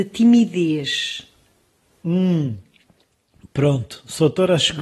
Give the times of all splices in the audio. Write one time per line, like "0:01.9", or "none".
none